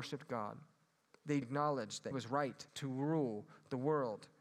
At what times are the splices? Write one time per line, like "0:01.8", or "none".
0:01.4
0:02.1
0:02.7